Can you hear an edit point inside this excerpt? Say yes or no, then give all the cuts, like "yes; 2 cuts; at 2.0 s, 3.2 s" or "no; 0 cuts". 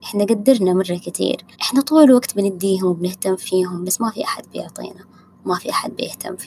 yes; 1 cut; at 1.5 s